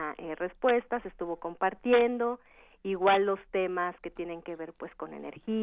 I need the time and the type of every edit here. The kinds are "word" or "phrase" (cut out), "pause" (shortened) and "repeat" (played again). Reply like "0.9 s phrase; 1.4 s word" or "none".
none